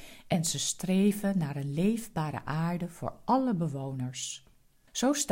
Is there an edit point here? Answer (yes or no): no